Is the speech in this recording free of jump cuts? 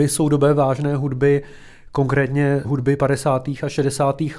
yes; 0 cuts

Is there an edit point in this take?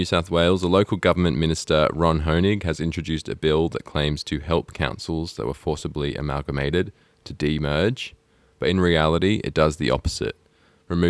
no; 0 cuts

